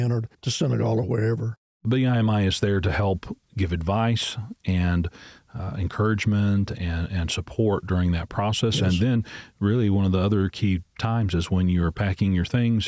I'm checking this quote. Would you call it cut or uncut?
cut